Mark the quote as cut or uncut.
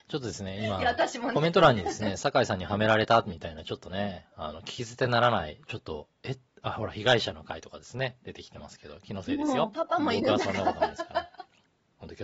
uncut